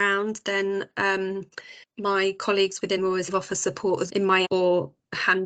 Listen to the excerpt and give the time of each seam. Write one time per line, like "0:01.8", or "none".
0:01.8
0:03.0
0:03.3
0:04.1
0:04.4